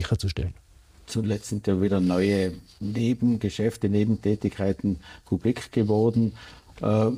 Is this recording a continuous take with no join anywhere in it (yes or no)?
yes